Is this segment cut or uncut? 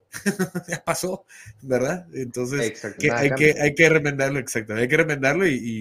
cut